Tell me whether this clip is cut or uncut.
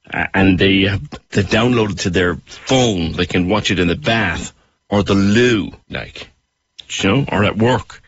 cut